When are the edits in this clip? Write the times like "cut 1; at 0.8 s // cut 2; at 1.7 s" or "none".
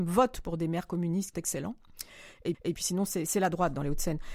cut 1; at 1.3 s // cut 2; at 2.5 s